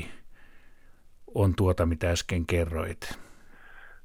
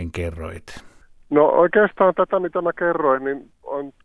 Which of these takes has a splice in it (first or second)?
second